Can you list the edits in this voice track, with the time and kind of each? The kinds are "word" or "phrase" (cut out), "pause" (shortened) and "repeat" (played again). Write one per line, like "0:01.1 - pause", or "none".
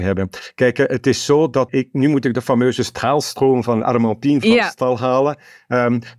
0:01.7 - word